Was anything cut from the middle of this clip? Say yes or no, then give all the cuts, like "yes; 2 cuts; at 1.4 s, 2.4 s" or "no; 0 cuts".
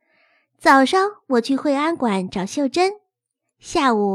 no; 0 cuts